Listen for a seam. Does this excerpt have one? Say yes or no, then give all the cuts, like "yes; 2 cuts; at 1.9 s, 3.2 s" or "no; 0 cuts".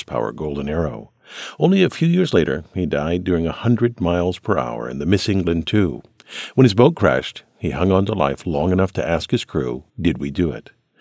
yes; 1 cut; at 9.9 s